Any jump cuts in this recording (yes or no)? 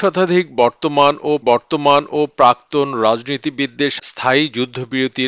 yes